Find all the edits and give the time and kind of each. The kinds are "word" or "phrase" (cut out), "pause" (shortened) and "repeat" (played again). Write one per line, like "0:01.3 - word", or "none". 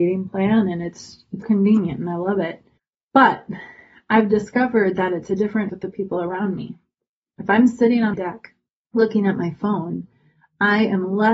0:01.4 - word
0:02.8 - pause
0:05.7 - word
0:08.1 - word